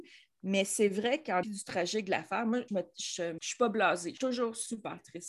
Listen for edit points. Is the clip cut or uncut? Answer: cut